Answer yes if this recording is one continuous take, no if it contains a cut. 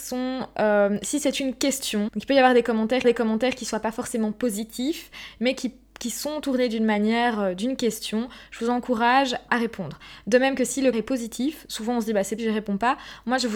no